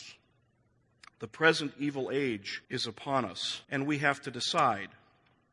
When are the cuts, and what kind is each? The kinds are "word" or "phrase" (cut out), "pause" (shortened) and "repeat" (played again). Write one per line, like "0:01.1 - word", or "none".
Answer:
0:02.6 - pause
0:03.6 - pause